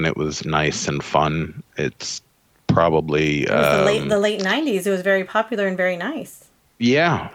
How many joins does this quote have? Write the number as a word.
zero